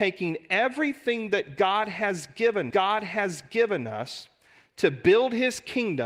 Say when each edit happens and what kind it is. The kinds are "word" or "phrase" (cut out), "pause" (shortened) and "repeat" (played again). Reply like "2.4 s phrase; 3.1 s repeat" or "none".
2.7 s repeat